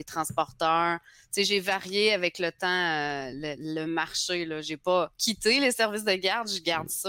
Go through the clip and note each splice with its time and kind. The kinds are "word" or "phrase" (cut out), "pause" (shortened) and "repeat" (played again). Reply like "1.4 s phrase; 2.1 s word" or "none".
none